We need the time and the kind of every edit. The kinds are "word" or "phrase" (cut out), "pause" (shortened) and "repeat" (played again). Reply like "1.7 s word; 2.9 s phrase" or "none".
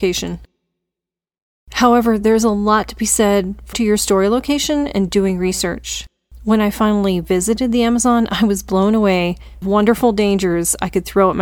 3.7 s word; 9.6 s phrase